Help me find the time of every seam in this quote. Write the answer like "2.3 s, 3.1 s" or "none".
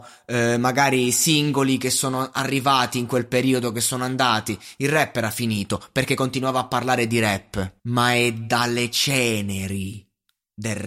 7.8 s